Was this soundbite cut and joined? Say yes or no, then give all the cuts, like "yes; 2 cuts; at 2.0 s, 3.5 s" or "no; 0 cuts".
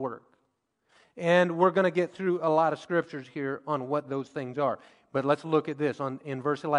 no; 0 cuts